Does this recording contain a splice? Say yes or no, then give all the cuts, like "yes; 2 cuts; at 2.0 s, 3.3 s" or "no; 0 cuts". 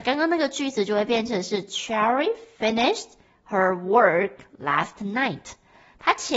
no; 0 cuts